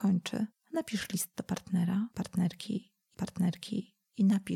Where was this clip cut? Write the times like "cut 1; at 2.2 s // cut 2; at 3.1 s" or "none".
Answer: cut 1; at 3.1 s

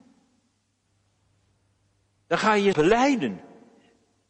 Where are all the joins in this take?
cut 1; at 2.7 s

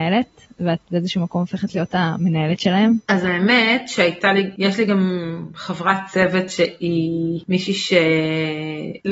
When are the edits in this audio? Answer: none

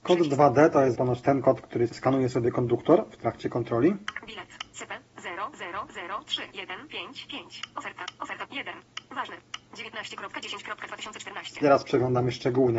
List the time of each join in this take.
cut 1; at 0.9 s // cut 2; at 1.9 s // cut 3; at 8.5 s

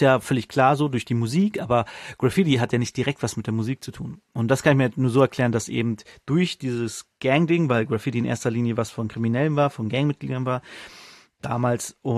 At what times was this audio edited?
none

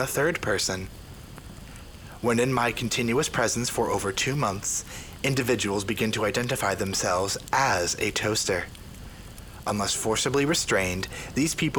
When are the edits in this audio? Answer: none

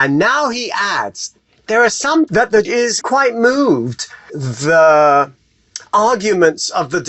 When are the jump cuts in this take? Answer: cut 1; at 1.7 s // cut 2; at 2.3 s // cut 3; at 2.6 s // cut 4; at 3.0 s // cut 5; at 4.3 s

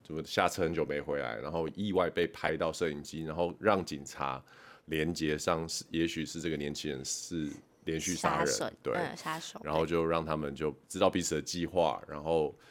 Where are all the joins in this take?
cut 1; at 10.8 s

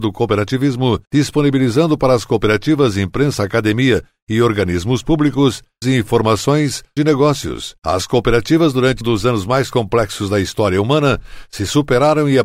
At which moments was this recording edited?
cut 1; at 1.1 s // cut 2; at 5.8 s // cut 3; at 7.0 s // cut 4; at 9.0 s

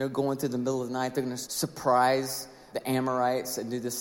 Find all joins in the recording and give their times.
cut 1; at 1.4 s // cut 2; at 2.7 s

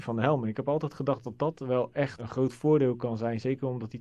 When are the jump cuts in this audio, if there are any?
cut 1; at 2.2 s

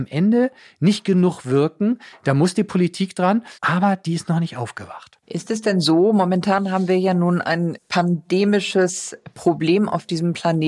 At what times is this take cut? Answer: cut 1; at 3.6 s // cut 2; at 5.2 s // cut 3; at 7.8 s

